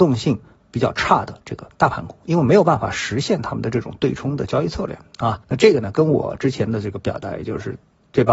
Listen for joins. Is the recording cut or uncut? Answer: cut